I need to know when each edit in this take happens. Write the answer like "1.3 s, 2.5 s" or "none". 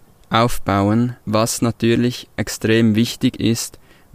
1.2 s